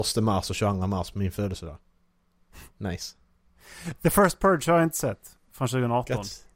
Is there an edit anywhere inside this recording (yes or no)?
yes